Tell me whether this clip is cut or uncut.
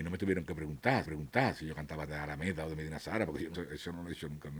cut